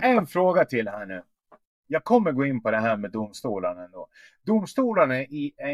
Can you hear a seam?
no; 0 cuts

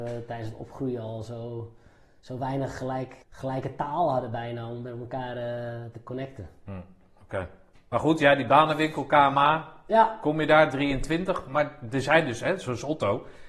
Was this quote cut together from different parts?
yes; 2 cuts; at 3.2 s, 7.7 s

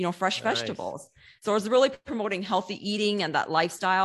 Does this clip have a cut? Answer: no; 0 cuts

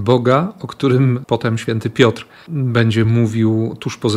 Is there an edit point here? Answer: no; 0 cuts

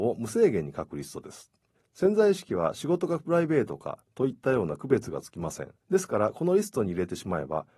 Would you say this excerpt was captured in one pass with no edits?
no; 2 cuts; at 1.7 s, 5.8 s

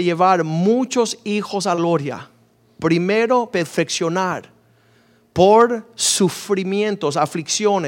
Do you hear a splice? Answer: yes; 2 cuts; at 1.7 s, 3.5 s

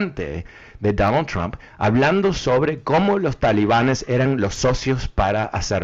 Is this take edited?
no; 0 cuts

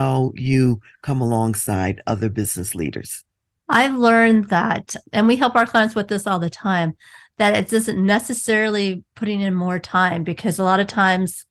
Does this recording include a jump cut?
no; 0 cuts

